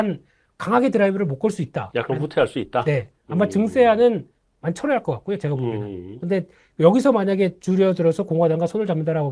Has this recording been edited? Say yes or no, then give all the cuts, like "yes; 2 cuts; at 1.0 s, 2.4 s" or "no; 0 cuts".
no; 0 cuts